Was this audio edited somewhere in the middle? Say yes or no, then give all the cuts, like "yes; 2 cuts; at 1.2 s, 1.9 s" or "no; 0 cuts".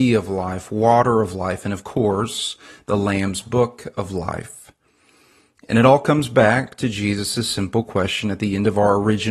no; 0 cuts